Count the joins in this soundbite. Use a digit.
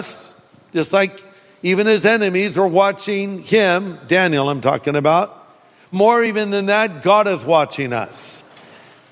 0